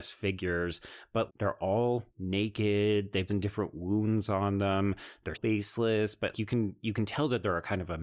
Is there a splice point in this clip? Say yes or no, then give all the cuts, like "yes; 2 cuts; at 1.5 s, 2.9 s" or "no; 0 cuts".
yes; 5 cuts; at 1.3 s, 2.1 s, 3.3 s, 5.3 s, 6.3 s